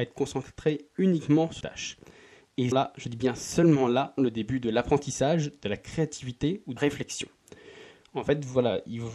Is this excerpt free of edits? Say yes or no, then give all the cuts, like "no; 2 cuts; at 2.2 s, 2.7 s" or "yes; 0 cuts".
no; 4 cuts; at 1.6 s, 2.7 s, 4.2 s, 6.8 s